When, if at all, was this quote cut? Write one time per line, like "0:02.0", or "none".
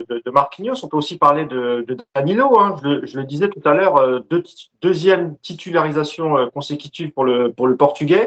none